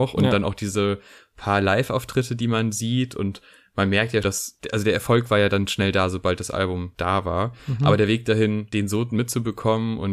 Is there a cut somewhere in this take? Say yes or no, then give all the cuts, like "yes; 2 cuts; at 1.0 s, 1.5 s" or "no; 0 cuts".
yes; 1 cut; at 4.2 s